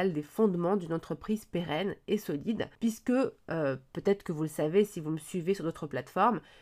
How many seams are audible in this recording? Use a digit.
1